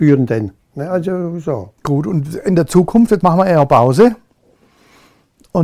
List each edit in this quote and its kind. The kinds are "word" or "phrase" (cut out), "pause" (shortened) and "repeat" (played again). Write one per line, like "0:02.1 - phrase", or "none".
0:01.8 - pause
0:03.2 - phrase